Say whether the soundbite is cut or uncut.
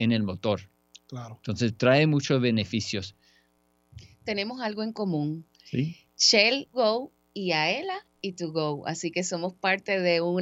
cut